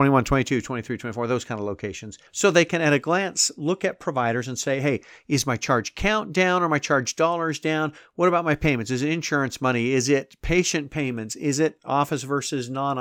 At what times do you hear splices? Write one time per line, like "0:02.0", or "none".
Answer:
0:02.3

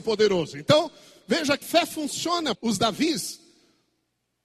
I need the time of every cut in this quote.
0:01.6
0:02.5

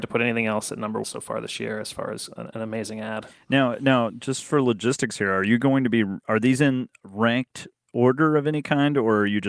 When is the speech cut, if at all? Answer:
0:01.0

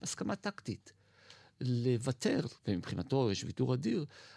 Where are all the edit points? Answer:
0:02.6

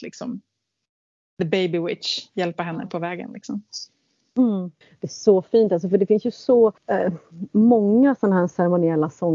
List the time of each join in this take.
0:04.8
0:06.8

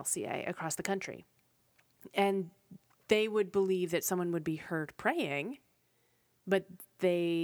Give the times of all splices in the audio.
none

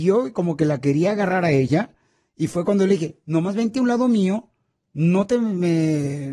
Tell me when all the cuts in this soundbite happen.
none

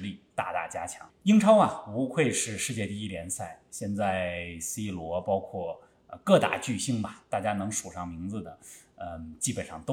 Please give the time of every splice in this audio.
0:01.1

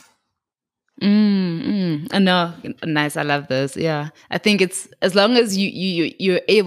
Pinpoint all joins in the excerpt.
none

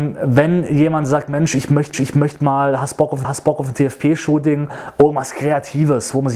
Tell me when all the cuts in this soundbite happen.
0:01.9
0:03.2

